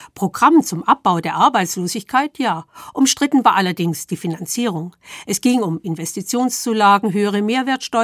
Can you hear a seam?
no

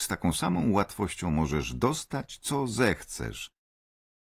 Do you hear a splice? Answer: no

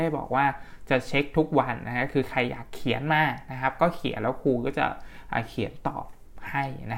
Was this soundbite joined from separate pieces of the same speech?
no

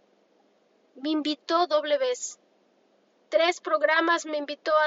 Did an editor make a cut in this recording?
yes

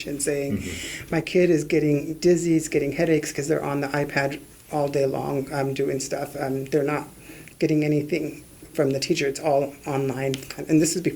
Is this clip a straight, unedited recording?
yes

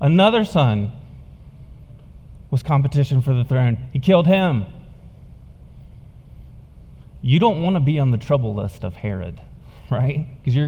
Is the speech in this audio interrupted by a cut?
no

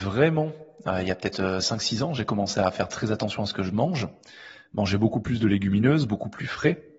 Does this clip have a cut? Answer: no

